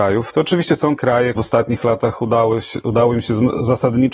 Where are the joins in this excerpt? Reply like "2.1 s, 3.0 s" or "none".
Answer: 1.0 s, 1.4 s